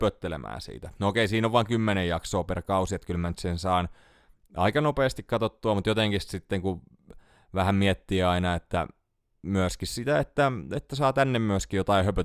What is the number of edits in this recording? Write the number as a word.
zero